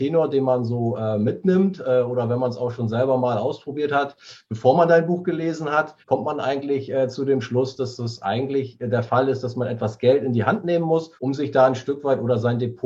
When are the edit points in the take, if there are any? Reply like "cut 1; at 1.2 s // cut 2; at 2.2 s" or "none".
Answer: cut 1; at 6.0 s // cut 2; at 11.2 s